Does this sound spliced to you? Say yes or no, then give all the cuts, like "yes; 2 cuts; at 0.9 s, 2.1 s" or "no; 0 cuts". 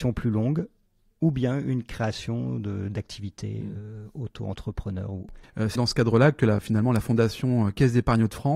yes; 2 cuts; at 5.4 s, 5.8 s